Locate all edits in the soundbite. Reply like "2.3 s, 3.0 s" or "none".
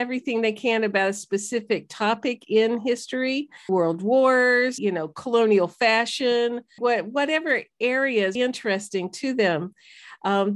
3.7 s, 4.8 s, 6.8 s, 8.4 s